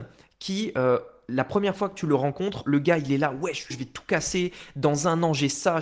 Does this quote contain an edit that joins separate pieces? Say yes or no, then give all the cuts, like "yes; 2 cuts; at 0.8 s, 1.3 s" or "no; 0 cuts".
yes; 1 cut; at 3.7 s